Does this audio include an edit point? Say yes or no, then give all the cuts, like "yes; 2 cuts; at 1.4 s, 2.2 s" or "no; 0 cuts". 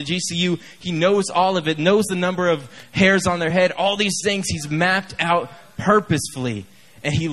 no; 0 cuts